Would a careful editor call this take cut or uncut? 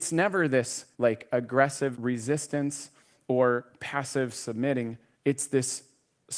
cut